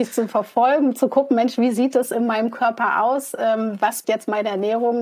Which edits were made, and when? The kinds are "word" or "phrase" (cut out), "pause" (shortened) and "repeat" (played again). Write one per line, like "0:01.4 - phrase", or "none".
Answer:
0:04.0 - word